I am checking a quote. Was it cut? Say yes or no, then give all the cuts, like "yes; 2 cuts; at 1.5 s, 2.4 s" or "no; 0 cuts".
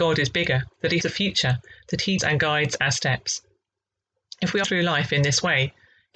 yes; 3 cuts; at 1.0 s, 2.2 s, 4.6 s